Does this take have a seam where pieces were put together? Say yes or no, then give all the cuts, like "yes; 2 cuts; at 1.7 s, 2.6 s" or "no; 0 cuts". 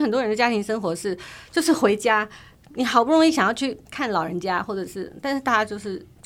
no; 0 cuts